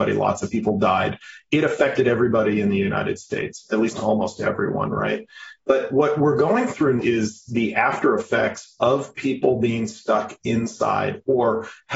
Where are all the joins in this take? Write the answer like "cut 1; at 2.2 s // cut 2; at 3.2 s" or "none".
cut 1; at 7.0 s